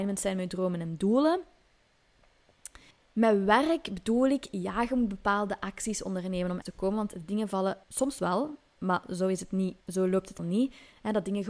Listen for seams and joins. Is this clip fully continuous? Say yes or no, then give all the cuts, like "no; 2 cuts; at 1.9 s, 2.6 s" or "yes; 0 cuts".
no; 5 cuts; at 2.9 s, 6.6 s, 7.8 s, 9.8 s, 10.4 s